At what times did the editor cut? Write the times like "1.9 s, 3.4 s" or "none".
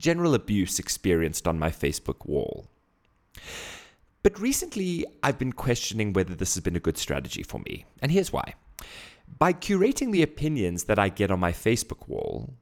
none